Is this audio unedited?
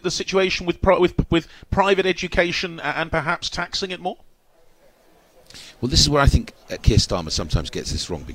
yes; 0 cuts

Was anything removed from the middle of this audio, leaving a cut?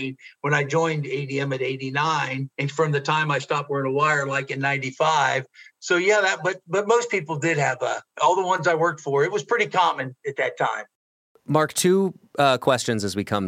yes; 2 cuts; at 2.5 s, 8.1 s

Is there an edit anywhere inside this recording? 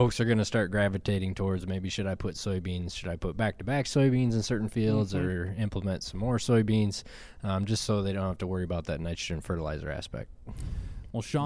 no; 0 cuts

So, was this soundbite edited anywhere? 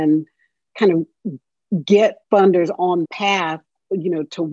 yes; 2 cuts; at 2.2 s, 3.0 s

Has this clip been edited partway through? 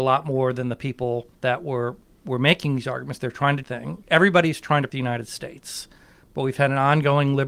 yes; 3 cuts; at 1.3 s, 3.6 s, 4.9 s

